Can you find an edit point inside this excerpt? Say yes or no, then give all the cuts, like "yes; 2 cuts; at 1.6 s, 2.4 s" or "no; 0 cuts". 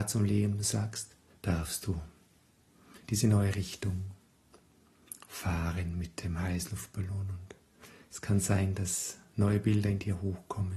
yes; 2 cuts; at 1.3 s, 3.0 s